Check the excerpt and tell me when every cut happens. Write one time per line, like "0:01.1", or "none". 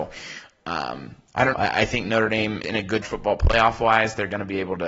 0:01.5
0:02.6
0:03.0